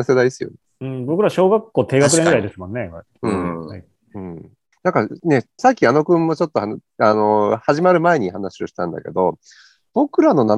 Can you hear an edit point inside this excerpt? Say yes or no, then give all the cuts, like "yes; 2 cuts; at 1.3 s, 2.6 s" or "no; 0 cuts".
yes; 3 cuts; at 4.0 s, 4.7 s, 5.6 s